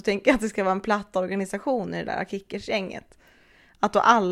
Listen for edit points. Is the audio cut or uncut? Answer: uncut